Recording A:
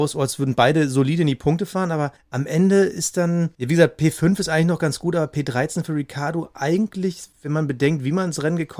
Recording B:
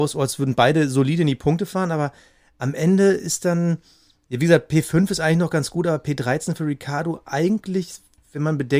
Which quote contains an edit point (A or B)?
A